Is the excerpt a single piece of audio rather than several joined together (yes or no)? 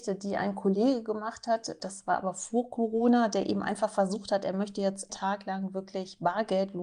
no